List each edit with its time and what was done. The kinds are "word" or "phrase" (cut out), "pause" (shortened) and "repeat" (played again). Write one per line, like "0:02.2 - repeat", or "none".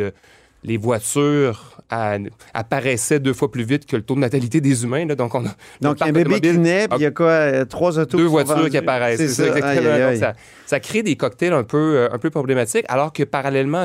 none